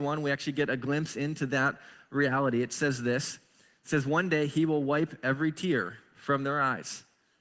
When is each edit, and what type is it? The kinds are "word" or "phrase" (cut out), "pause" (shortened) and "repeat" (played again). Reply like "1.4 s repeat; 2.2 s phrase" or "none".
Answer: none